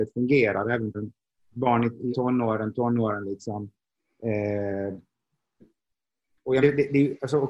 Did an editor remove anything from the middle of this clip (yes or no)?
yes